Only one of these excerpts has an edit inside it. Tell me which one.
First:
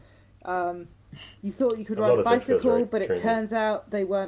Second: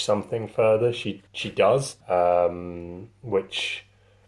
second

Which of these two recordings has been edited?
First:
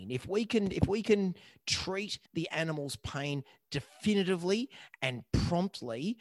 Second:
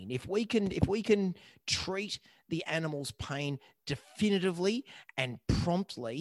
first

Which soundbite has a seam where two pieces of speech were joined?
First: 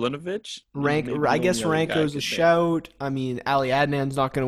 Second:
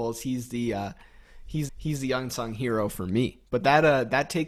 second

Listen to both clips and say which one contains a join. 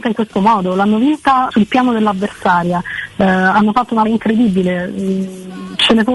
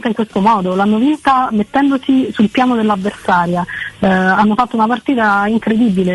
first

